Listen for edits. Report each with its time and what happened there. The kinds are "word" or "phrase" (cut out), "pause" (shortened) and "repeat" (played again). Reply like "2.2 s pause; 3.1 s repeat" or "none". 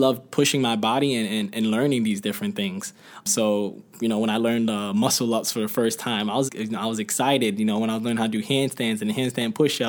6.5 s word